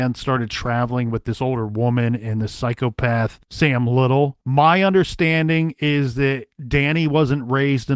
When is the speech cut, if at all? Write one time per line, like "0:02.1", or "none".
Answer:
0:03.4
0:04.4